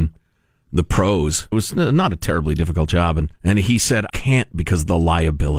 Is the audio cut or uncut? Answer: cut